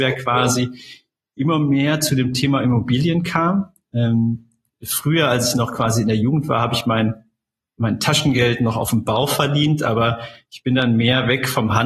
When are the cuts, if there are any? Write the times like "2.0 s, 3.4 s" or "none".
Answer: none